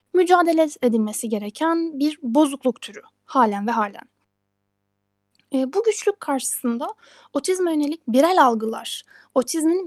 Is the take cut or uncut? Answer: uncut